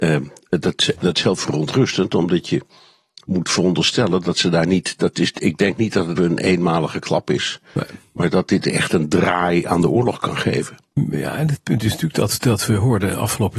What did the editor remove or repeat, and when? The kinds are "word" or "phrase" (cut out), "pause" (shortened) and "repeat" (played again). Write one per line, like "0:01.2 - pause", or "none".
0:06.2 - word